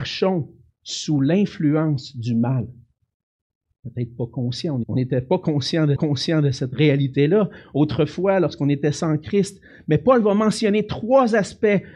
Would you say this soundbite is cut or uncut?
cut